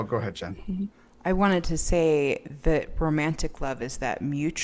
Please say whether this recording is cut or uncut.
uncut